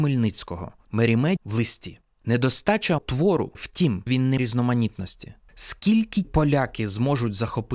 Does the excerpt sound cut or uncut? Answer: cut